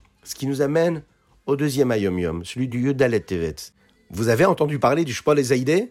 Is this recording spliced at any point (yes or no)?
no